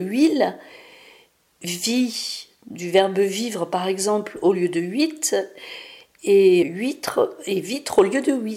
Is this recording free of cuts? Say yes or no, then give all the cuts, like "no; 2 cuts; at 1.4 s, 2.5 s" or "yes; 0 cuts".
no; 1 cut; at 6.6 s